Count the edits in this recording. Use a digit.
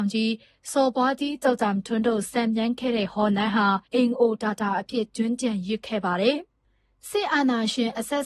1